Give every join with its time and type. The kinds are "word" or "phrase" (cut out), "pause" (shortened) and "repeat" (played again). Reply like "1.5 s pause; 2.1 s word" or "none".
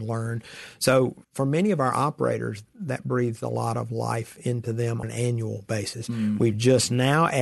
1.2 s pause; 5.0 s word